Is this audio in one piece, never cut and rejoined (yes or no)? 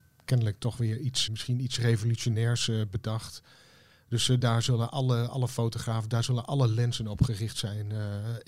no